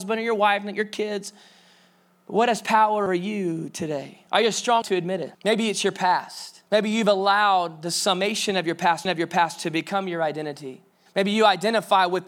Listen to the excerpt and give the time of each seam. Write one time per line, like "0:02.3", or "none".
0:03.1
0:04.3
0:04.8
0:05.3
0:06.7
0:09.0
0:11.1